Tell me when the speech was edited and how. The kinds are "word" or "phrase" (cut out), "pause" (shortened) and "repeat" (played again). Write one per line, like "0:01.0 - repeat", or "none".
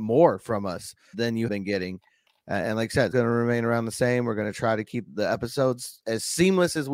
0:01.1 - word
0:01.5 - word
0:03.1 - word
0:05.1 - word
0:06.0 - word